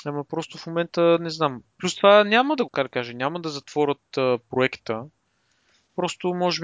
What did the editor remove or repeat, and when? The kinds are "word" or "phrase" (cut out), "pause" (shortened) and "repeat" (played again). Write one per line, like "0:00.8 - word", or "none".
0:02.7 - phrase